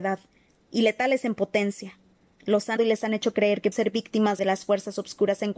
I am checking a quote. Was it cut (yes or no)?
yes